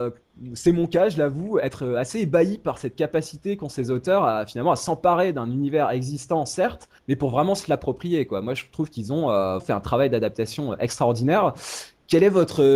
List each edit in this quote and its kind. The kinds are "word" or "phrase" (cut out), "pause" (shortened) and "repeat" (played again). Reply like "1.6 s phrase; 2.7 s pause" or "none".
7.0 s pause; 9.6 s word